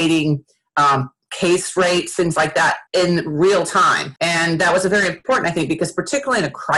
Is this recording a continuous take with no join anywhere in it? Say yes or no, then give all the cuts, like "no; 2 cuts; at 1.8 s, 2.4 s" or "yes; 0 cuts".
no; 2 cuts; at 2.9 s, 4.2 s